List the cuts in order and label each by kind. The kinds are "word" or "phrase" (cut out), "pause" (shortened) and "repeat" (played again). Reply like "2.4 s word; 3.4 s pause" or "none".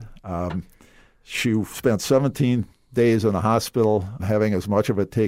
4.2 s word